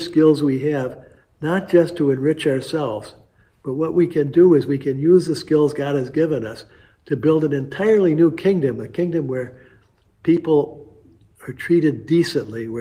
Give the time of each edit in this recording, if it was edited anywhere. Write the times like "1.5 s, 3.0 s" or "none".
none